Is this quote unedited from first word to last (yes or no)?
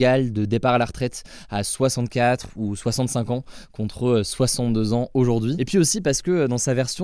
yes